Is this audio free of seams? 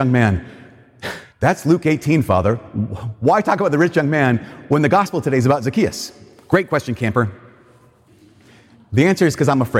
no; 1 cut; at 1.3 s

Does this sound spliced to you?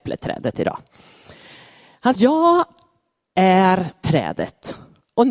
yes; 1 cut; at 2.2 s

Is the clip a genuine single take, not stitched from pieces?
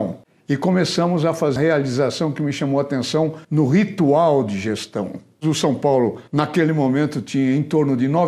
no; 3 cuts; at 1.6 s, 3.4 s, 6.3 s

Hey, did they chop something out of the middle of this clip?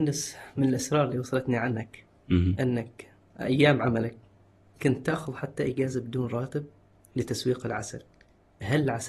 no; 0 cuts

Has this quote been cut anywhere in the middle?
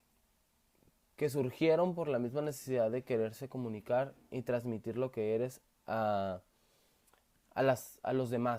no; 0 cuts

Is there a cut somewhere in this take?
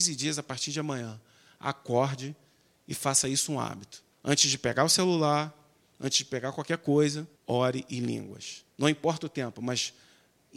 yes; 3 cuts; at 4.1 s, 7.4 s, 8.7 s

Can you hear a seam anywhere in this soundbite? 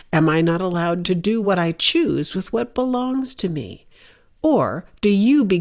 no; 0 cuts

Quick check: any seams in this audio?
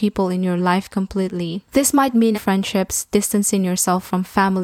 yes; 1 cut; at 2.3 s

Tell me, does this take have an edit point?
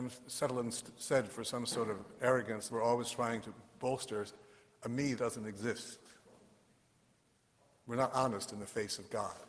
yes; 2 cuts; at 2.7 s, 5.2 s

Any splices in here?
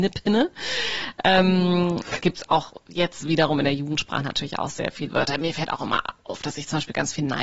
yes; 2 cuts; at 2.2 s, 5.1 s

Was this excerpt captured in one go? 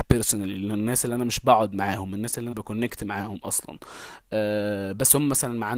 no; 1 cut; at 2.5 s

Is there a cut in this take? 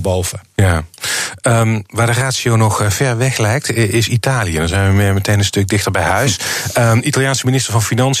no; 0 cuts

